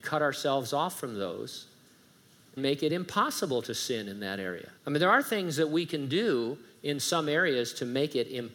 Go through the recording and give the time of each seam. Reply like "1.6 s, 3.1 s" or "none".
2.6 s, 4.8 s